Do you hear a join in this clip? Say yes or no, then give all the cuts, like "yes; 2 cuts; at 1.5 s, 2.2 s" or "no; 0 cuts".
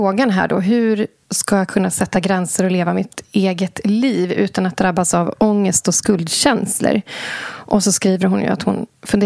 no; 0 cuts